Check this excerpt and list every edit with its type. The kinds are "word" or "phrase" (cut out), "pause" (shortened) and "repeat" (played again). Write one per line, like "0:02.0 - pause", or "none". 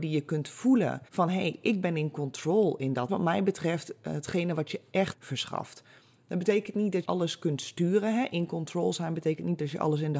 0:01.1 - pause
0:03.1 - phrase
0:05.1 - word
0:07.0 - word